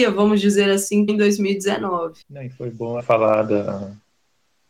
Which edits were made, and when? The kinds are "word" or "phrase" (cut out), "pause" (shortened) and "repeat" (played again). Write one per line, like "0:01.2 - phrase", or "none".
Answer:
0:01.1 - phrase
0:02.2 - pause
0:03.0 - word

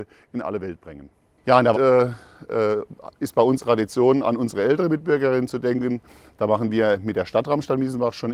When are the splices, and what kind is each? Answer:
0:01.7 - word
0:03.6 - word

